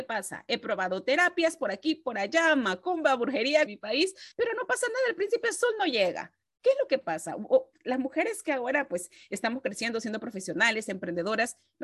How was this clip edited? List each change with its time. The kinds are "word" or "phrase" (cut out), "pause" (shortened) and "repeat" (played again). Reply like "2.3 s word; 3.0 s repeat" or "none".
3.7 s phrase; 4.3 s pause

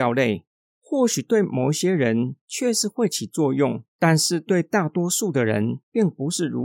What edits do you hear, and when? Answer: 3.9 s pause

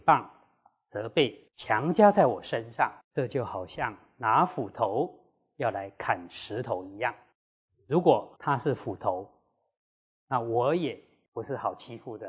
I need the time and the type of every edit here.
1.5 s pause; 3.0 s pause; 7.3 s pause; 8.4 s pause

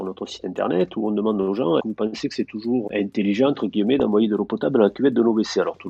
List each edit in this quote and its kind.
1.8 s word; 2.9 s word

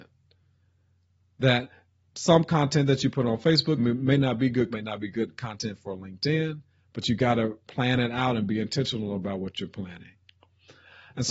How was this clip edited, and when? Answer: 3.8 s word; 4.7 s phrase; 7.6 s pause

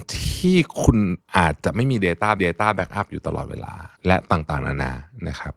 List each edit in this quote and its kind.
1.2 s pause; 2.4 s repeat; 3.9 s pause

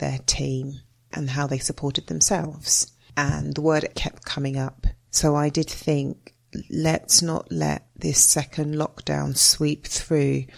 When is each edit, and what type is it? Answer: 3.9 s word

